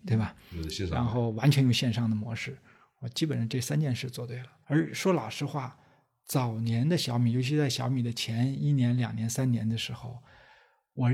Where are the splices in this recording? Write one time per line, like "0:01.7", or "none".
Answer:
0:04.6